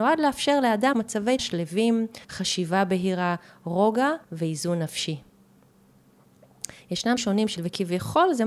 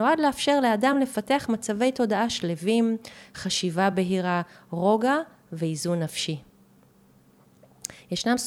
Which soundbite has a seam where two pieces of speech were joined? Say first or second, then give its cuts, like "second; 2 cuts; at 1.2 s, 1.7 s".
first; 6 cuts; at 0.9 s, 1.4 s, 2.2 s, 4.2 s, 7.2 s, 7.6 s